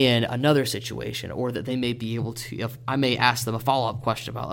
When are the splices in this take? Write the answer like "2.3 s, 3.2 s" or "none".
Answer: none